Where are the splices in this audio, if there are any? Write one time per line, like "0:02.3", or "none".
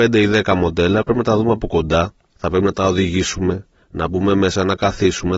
none

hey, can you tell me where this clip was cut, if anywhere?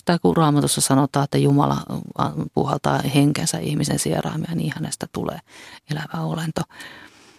none

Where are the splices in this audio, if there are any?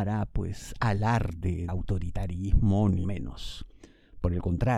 0:01.7
0:03.0

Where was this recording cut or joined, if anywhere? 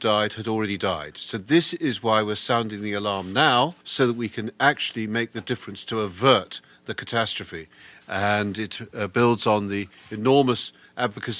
0:03.8

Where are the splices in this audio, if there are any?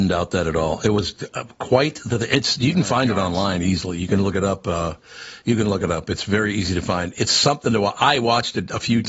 none

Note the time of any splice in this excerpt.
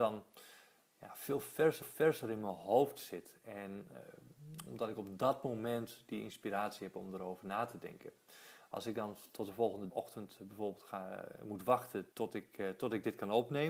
0:01.8
0:09.9
0:12.1

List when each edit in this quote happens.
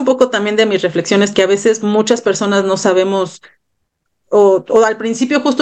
none

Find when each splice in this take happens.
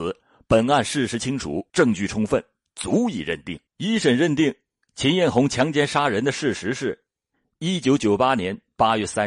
0:01.7
0:03.7

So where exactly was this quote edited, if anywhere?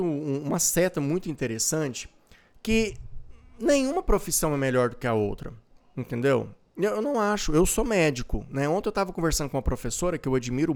none

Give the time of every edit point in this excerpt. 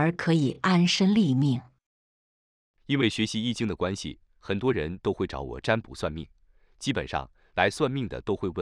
none

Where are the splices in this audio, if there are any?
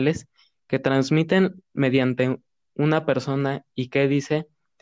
none

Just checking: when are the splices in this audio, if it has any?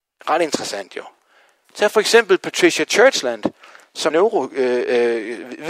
0:04.1

